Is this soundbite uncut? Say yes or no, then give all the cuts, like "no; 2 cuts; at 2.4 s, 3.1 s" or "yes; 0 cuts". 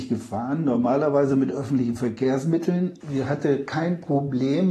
no; 1 cut; at 3.0 s